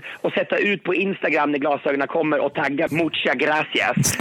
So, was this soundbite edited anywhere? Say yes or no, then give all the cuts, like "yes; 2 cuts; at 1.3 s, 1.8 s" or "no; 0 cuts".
yes; 1 cut; at 2.9 s